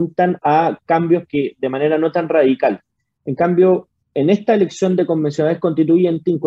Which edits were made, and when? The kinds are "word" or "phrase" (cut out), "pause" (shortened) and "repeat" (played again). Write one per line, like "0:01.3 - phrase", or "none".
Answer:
0:01.3 - word